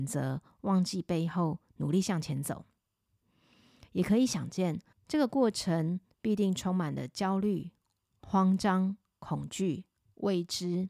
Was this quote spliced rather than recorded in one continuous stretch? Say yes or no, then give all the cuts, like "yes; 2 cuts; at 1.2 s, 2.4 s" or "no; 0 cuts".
yes; 1 cut; at 4.9 s